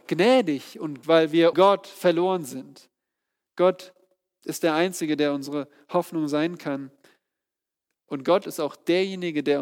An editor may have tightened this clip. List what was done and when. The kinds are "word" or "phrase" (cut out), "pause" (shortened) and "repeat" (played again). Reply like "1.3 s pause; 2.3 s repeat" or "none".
1.0 s word; 1.5 s word